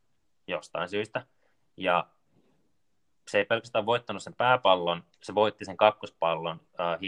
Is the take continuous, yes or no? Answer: yes